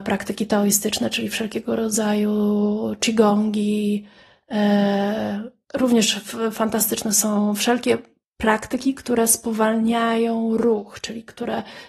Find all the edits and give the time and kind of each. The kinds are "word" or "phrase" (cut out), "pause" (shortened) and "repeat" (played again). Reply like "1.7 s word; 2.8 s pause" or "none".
none

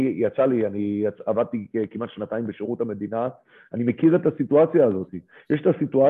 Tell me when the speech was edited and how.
none

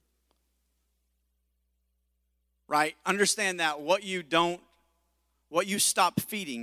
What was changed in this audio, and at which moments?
none

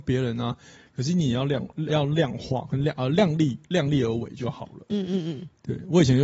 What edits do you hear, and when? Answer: 1.9 s word

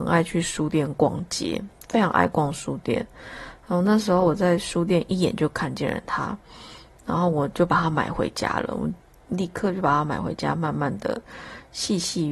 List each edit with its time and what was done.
none

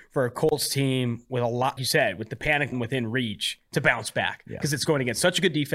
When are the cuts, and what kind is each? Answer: 1.8 s word; 2.7 s word

